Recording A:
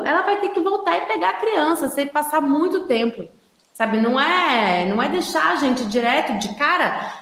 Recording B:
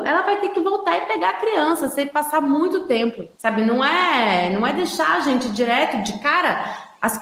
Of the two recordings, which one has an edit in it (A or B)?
B